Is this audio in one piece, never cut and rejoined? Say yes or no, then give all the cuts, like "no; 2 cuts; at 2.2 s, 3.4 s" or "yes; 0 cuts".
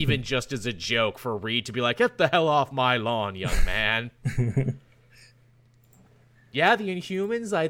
yes; 0 cuts